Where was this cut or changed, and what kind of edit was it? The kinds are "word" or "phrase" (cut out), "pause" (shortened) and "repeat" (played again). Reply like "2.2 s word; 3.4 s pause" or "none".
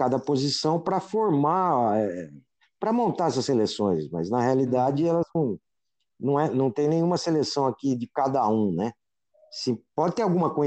none